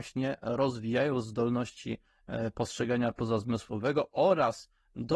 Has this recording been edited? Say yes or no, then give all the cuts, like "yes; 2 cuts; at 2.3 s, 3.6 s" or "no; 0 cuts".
no; 0 cuts